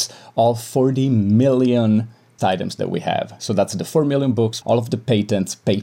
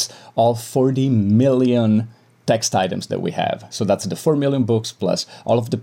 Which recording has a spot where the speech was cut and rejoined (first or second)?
first